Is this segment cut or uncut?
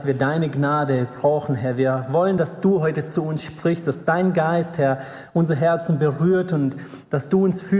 uncut